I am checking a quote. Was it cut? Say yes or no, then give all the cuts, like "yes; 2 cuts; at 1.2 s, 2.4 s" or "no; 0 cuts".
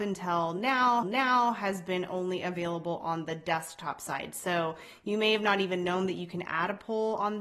yes; 1 cut; at 1.0 s